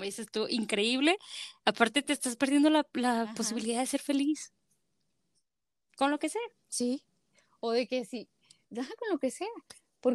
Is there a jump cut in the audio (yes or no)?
no